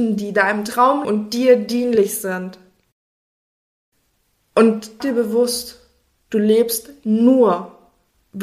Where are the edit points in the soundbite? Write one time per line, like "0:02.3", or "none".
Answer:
0:01.0
0:05.0